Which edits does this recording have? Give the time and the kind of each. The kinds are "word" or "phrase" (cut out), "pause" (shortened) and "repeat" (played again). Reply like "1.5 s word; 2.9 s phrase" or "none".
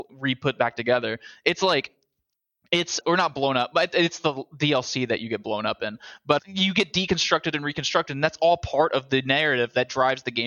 3.0 s word; 6.4 s word